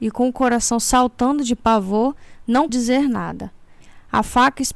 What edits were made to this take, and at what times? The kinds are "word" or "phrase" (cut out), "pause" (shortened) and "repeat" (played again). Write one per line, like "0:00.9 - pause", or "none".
0:02.7 - word